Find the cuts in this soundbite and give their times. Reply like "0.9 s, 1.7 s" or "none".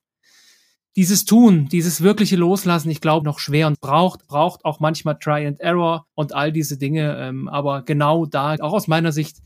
3.2 s, 3.7 s, 4.2 s, 6.1 s, 8.6 s